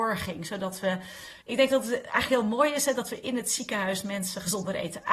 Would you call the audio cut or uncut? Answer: cut